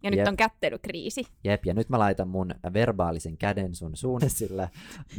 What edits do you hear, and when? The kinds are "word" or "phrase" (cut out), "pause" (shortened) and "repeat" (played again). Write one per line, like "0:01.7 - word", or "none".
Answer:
0:04.2 - word